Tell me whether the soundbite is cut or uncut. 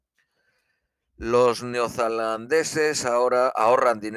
uncut